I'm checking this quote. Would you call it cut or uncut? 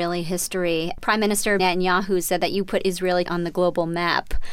cut